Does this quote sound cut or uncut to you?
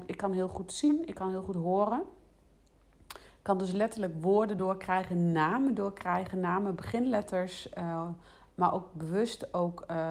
uncut